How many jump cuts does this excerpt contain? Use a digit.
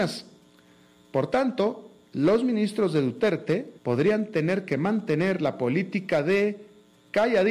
1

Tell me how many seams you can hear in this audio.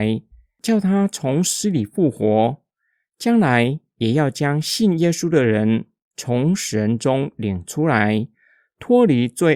0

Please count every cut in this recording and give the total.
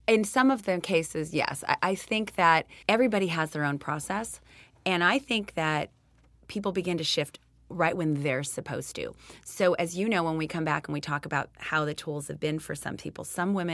1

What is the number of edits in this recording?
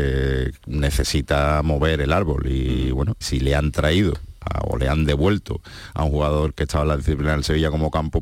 1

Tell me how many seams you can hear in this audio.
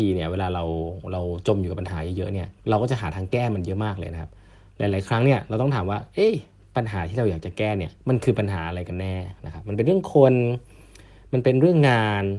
2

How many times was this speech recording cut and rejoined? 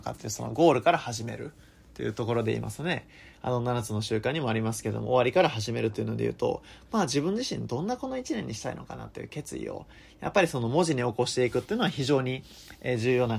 0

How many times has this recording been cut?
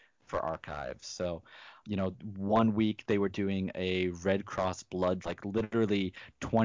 2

